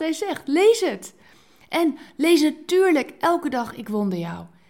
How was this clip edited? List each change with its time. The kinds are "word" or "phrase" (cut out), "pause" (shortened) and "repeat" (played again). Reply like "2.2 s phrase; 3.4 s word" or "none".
none

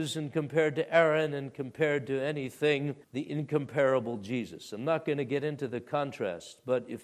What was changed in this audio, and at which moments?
3.0 s pause

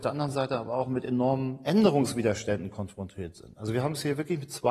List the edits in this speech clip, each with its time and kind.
none

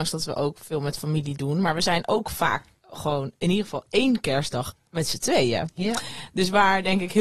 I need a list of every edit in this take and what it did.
none

